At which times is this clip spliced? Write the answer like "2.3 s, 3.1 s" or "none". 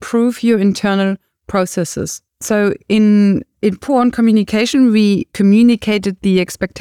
2.3 s

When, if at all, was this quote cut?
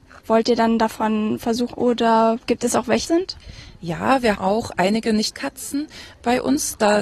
1.7 s, 3.0 s, 4.3 s, 5.3 s

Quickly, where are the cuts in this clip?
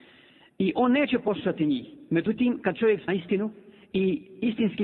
3.1 s

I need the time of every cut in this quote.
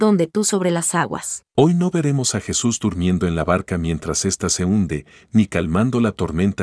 1.5 s

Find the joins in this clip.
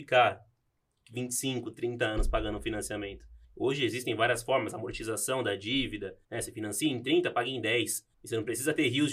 3.4 s, 6.2 s, 8.1 s

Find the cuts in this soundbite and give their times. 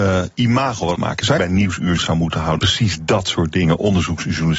1.0 s, 1.4 s, 2.0 s, 2.6 s

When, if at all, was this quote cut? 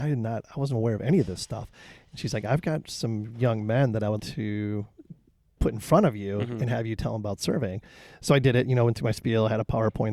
4.2 s

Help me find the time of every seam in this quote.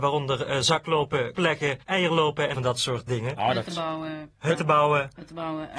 1.4 s, 1.8 s, 2.5 s, 3.1 s

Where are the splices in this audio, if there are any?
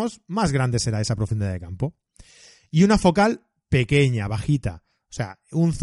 none

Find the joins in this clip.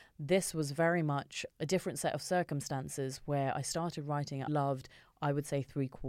4.5 s

